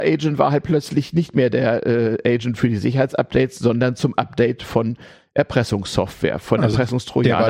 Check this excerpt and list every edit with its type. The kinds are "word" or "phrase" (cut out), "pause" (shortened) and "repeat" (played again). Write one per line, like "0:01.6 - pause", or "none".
none